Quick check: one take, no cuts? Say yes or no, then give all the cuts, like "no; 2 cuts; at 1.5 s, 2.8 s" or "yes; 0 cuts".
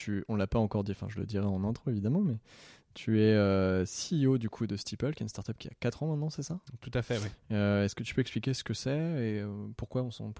yes; 0 cuts